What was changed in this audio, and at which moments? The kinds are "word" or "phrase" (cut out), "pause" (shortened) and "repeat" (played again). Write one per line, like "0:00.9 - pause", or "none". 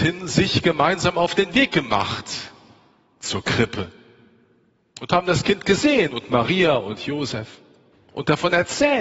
none